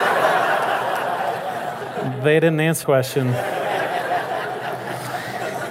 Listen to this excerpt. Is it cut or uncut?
cut